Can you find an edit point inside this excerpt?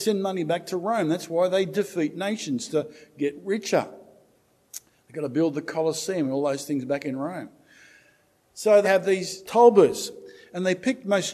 yes; 2 cuts; at 8.8 s, 9.4 s

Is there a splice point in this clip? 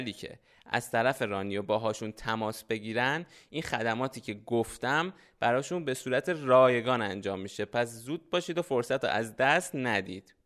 no; 0 cuts

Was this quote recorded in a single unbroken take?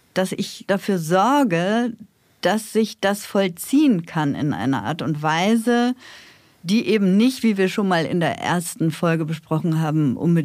yes; 0 cuts

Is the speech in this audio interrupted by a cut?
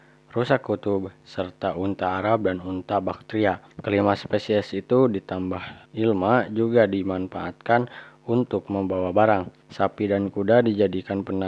yes; 3 cuts; at 3.7 s, 5.8 s, 9.6 s

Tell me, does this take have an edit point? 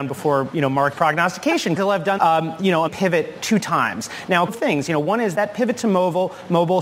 yes; 6 cuts; at 0.9 s, 1.8 s, 2.2 s, 2.9 s, 4.5 s, 5.3 s

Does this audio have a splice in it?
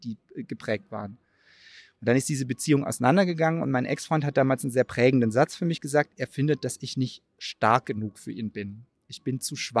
no; 0 cuts

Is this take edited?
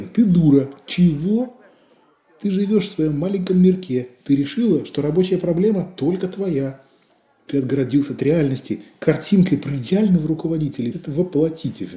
yes; 1 cut; at 10.9 s

